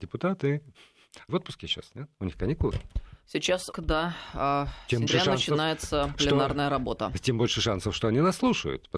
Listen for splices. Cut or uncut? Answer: cut